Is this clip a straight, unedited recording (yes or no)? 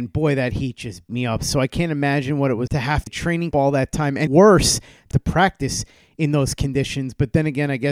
no